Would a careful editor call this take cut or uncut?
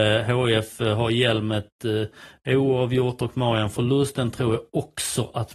uncut